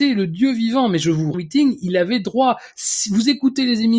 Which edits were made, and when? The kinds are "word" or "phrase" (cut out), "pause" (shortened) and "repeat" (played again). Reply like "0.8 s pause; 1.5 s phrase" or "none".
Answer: 1.3 s phrase